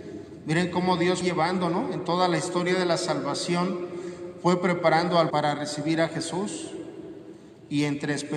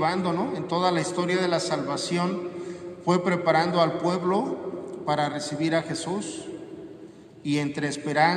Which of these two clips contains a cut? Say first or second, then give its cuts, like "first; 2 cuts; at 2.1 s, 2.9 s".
first; 2 cuts; at 1.2 s, 5.3 s